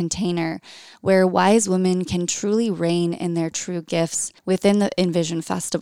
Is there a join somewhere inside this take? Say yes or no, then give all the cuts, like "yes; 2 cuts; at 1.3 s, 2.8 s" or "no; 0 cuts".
yes; 1 cut; at 4.4 s